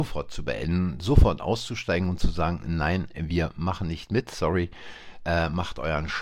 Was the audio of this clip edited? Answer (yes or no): no